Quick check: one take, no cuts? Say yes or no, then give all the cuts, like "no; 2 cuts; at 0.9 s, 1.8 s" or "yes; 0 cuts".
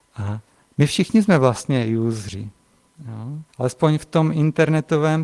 no; 1 cut; at 3.5 s